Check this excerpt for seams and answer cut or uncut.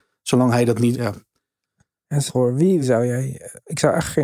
cut